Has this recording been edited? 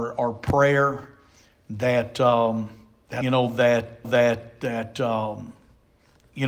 yes; 2 cuts; at 3.2 s, 4.0 s

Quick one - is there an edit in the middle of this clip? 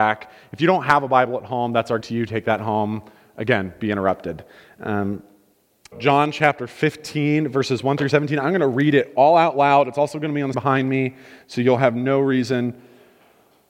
yes; 3 cuts; at 2.0 s, 5.9 s, 10.5 s

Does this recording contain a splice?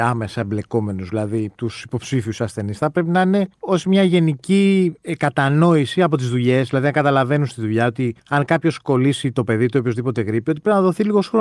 yes; 2 cuts; at 3.5 s, 8.2 s

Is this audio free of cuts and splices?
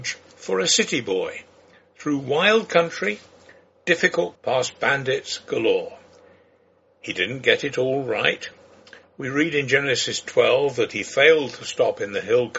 no; 1 cut; at 4.4 s

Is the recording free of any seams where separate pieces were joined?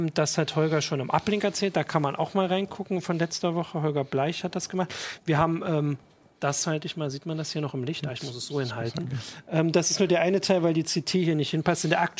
yes; 0 cuts

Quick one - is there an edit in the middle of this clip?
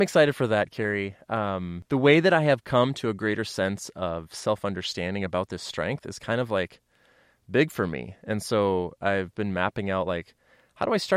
no; 0 cuts

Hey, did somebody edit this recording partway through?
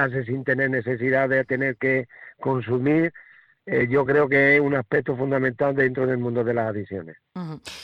no; 0 cuts

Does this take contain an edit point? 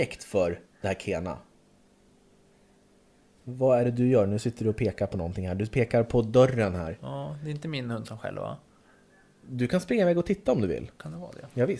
no; 0 cuts

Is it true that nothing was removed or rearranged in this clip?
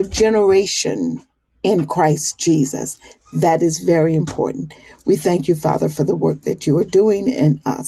yes; 0 cuts

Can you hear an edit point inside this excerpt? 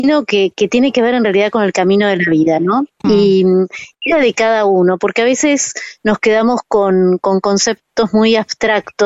yes; 1 cut; at 3.9 s

